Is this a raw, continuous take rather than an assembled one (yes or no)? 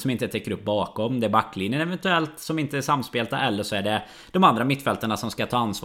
yes